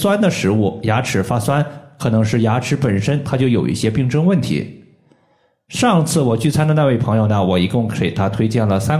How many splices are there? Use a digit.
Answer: 0